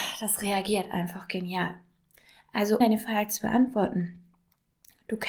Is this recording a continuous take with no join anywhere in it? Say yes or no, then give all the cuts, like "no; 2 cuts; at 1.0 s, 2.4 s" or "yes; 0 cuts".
no; 1 cut; at 2.8 s